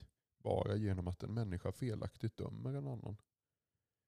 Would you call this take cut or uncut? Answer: uncut